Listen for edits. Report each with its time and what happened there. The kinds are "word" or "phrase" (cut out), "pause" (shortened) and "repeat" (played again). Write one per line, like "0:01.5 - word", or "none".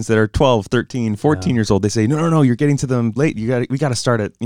0:03.2 - word

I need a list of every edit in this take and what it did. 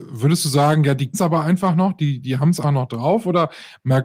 0:01.1 - word
0:02.6 - word

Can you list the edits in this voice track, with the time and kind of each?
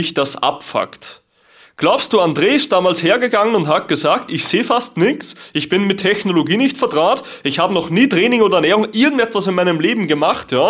none

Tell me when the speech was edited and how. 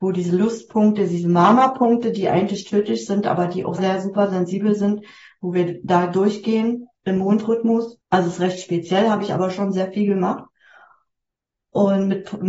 0:03.8 - word
0:06.9 - pause
0:08.0 - pause

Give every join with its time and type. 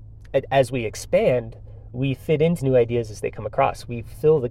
0:01.9 - word
0:02.6 - word

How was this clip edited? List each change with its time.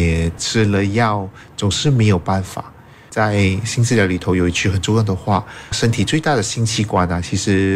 none

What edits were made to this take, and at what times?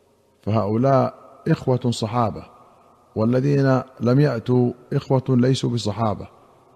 none

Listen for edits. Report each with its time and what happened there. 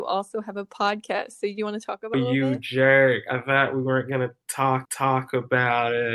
0:02.1 - word
0:04.8 - repeat

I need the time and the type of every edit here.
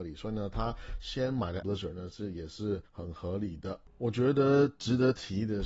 0:01.6 - word
0:02.9 - pause

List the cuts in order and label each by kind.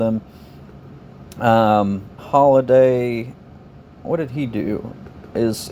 0:02.2 - word

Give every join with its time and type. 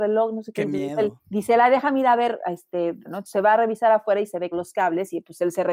0:01.2 - pause
0:03.1 - phrase
0:04.5 - phrase

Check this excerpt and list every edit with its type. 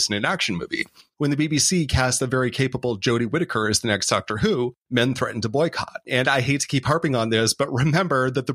0:04.8 - pause

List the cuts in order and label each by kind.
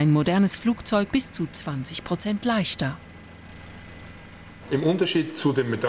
0:01.1 - word

